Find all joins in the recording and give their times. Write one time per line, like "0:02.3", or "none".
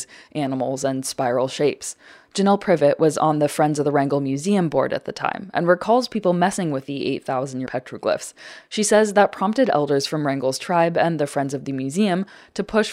0:07.7